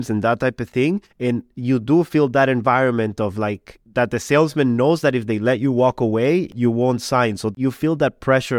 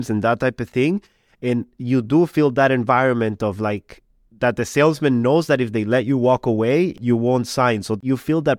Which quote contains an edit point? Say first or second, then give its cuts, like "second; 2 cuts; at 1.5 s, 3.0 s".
first; 2 cuts; at 1.1 s, 3.8 s